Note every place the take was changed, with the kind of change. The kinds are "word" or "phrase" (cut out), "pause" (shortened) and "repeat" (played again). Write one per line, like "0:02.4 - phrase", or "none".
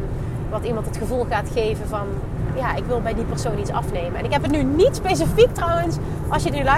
0:02.5 - word